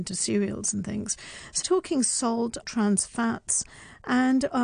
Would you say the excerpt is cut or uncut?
cut